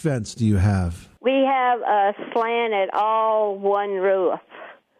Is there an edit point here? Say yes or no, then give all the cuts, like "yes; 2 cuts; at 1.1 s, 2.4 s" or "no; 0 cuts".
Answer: no; 0 cuts